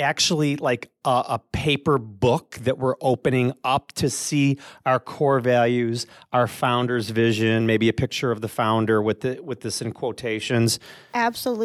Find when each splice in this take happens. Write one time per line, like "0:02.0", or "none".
none